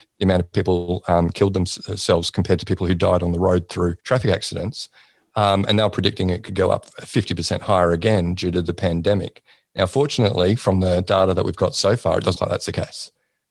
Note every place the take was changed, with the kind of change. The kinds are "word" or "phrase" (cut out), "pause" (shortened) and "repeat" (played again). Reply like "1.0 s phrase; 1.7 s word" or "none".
4.0 s pause; 12.3 s word